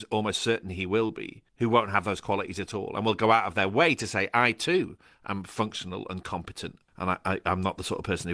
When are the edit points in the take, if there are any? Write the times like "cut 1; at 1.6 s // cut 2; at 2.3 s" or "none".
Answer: cut 1; at 1.5 s // cut 2; at 6.9 s

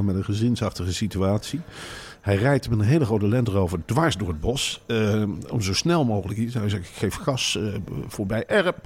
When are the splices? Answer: none

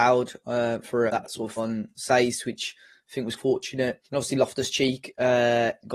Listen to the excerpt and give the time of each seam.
cut 1; at 1.1 s // cut 2; at 1.6 s // cut 3; at 3.4 s // cut 4; at 4.1 s

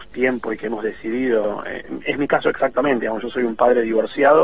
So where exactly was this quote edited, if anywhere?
none

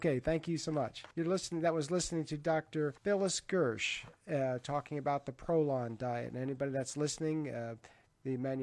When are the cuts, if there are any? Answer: cut 1; at 1.1 s // cut 2; at 3.0 s

